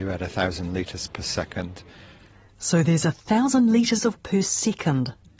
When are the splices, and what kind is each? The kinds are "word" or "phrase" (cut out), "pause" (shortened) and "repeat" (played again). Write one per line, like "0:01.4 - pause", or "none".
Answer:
0:04.2 - word